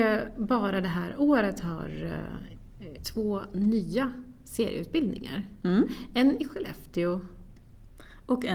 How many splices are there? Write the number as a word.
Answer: one